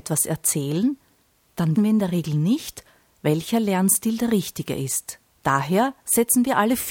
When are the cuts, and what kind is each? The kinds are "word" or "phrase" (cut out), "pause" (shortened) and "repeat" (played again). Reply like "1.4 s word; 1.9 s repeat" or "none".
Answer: 1.8 s word